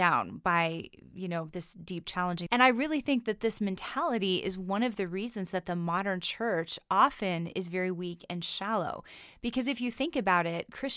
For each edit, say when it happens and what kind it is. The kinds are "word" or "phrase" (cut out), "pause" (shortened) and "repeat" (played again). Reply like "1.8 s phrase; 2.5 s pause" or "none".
2.5 s word